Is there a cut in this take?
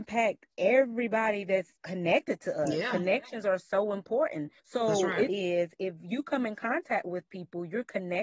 yes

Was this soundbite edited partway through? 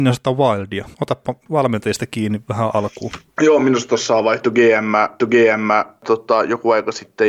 yes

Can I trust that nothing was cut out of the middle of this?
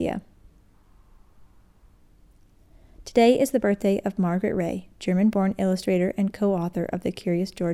yes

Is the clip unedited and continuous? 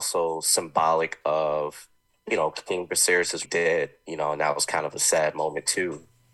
no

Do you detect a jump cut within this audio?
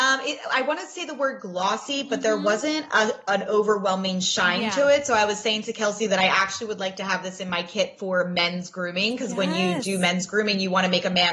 no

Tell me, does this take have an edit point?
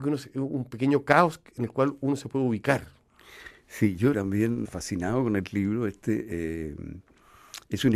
yes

